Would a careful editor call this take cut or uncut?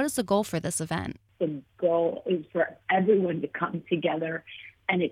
uncut